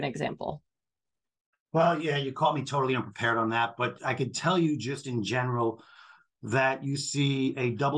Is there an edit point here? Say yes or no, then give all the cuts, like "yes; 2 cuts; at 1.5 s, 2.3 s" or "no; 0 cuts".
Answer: no; 0 cuts